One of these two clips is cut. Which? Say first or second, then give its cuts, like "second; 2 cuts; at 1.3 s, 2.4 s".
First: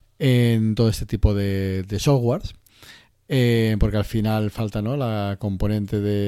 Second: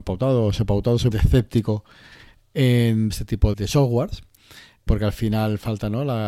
second; 4 cuts; at 1.1 s, 3.1 s, 3.5 s, 4.9 s